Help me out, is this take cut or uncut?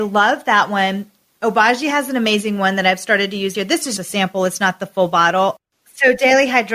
cut